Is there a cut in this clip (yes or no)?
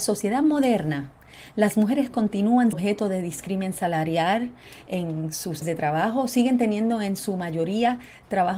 yes